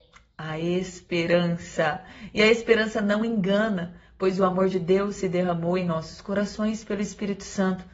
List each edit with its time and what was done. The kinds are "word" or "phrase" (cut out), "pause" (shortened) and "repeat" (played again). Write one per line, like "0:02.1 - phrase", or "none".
none